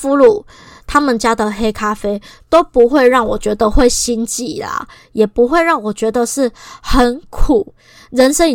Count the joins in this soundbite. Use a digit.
0